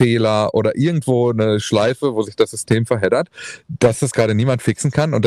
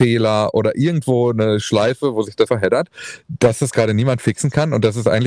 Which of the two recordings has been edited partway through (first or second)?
second